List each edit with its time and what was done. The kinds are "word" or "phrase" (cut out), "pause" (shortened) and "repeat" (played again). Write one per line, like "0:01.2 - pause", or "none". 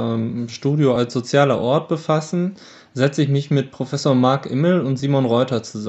none

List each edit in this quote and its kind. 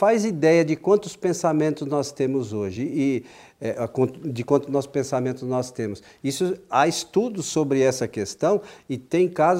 none

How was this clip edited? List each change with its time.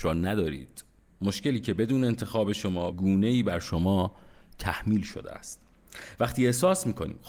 0:02.9 - word

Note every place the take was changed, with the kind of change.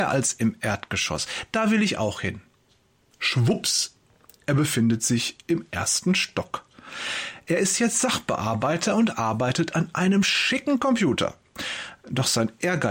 none

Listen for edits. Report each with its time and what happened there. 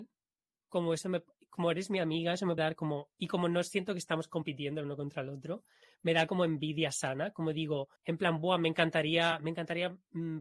0:02.6 - word
0:08.0 - pause

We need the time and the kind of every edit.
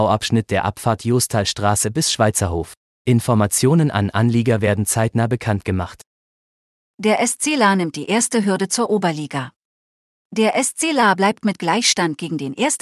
none

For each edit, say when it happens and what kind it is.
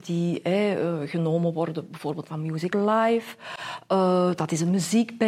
0:02.3 - phrase
0:02.7 - word

